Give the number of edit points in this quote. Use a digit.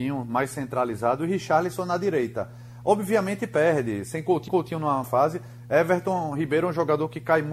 2